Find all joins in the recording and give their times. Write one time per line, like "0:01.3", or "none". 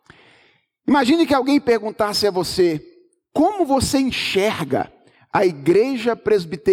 none

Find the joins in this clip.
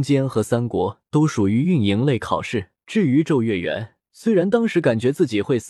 0:01.1
0:02.8
0:04.0

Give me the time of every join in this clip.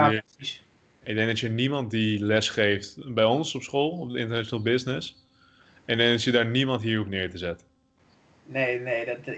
none

